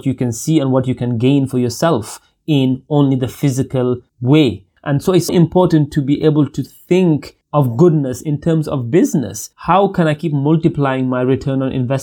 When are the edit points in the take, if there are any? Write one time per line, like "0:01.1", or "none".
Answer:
0:05.3
0:09.5